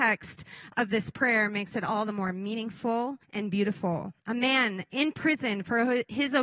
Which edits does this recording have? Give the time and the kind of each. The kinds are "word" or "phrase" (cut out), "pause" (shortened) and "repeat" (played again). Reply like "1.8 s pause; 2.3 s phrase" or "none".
3.2 s pause; 4.2 s pause